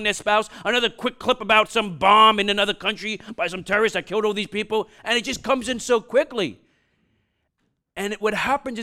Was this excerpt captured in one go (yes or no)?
yes